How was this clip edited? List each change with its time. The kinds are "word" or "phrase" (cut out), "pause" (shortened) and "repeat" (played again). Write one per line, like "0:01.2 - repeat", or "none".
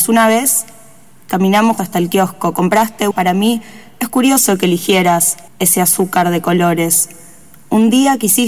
0:01.8 - word
0:03.1 - phrase
0:05.5 - pause